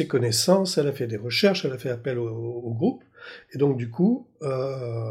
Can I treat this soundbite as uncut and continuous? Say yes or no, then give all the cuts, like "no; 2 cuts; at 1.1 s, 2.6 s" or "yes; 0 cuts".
yes; 0 cuts